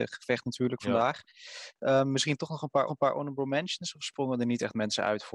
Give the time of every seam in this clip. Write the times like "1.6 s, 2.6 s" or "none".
2.9 s

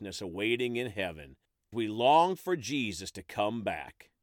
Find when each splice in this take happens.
1.7 s

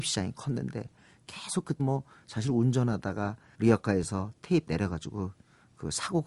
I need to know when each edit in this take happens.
1.8 s, 3.5 s, 4.7 s

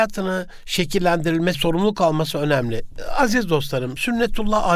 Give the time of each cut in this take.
1.5 s

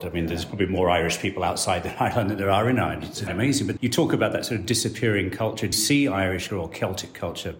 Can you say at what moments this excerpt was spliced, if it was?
3.3 s, 3.8 s, 5.7 s, 6.5 s

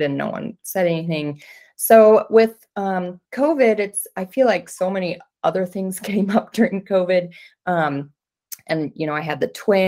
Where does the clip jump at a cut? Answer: none

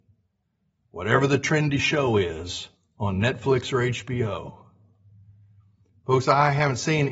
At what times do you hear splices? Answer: 2.8 s

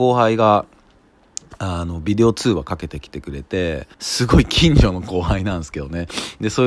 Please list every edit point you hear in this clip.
3.9 s

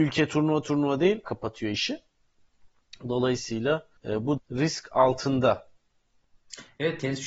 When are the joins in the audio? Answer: 1.2 s, 4.0 s, 4.4 s

